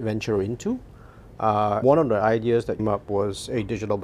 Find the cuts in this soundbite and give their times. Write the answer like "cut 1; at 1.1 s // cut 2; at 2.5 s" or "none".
cut 1; at 1.8 s // cut 2; at 2.8 s